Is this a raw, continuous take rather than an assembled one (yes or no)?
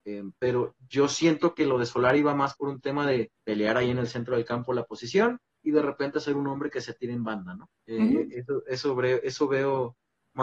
no